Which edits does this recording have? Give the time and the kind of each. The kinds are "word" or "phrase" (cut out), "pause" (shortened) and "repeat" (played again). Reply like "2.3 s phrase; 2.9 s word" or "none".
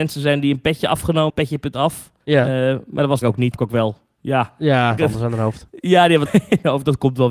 1.3 s word; 2.2 s pause; 3.2 s phrase; 3.5 s word; 5.0 s phrase; 6.3 s word